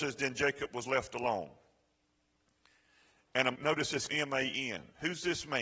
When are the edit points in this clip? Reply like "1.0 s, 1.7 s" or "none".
3.5 s, 4.1 s